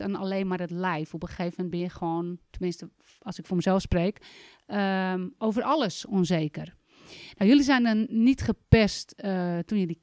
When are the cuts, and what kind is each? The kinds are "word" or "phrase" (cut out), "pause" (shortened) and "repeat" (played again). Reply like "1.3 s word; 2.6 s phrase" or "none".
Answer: none